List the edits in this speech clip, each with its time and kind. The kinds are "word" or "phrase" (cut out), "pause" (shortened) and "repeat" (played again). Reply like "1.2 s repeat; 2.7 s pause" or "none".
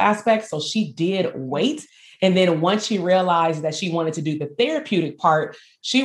none